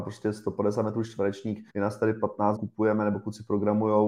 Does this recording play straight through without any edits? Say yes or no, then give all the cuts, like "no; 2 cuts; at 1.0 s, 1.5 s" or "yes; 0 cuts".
no; 2 cuts; at 1.7 s, 2.6 s